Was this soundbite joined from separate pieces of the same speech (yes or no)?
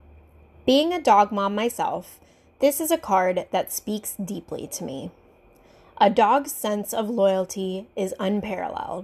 no